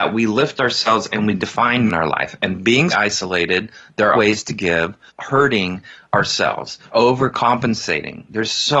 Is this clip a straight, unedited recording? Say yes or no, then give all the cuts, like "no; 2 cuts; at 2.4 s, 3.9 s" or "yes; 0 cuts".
no; 6 cuts; at 1.1 s, 1.9 s, 2.9 s, 4.1 s, 5.1 s, 6.9 s